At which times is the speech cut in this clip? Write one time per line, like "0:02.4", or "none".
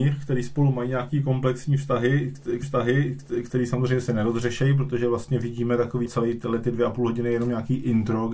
0:02.6
0:06.1

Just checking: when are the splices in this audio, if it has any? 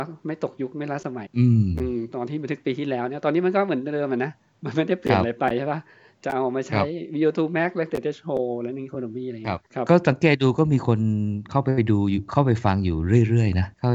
none

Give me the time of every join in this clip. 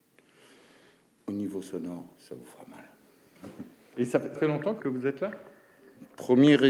0:02.1
0:03.7
0:04.4

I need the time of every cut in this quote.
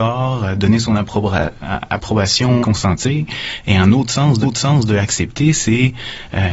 0:02.6
0:04.4

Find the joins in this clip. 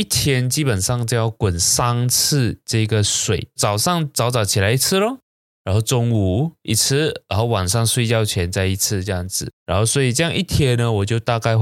0:09.6

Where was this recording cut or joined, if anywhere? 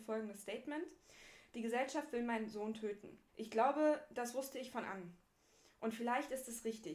0:03.3
0:04.8

